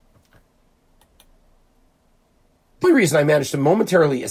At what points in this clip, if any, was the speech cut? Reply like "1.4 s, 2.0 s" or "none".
2.8 s

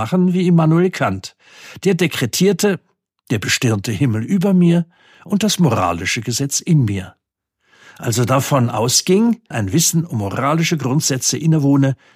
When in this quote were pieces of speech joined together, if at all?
9.5 s

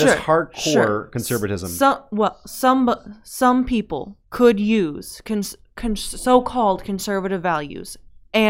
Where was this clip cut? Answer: 4.2 s

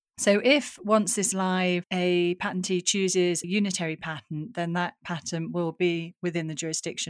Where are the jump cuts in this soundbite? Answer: 1.3 s, 3.4 s

